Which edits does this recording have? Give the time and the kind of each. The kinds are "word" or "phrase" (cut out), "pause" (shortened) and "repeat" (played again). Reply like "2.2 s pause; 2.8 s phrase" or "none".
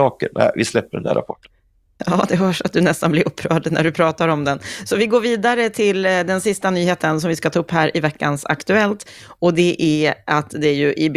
none